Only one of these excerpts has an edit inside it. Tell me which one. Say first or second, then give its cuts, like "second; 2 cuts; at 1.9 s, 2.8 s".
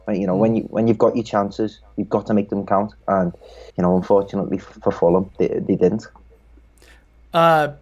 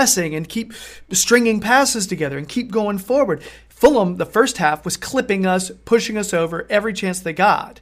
first; 1 cut; at 3.7 s